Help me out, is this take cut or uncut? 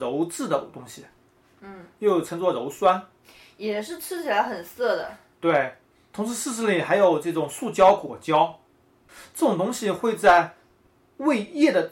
uncut